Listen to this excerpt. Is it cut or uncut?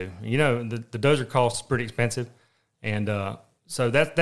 uncut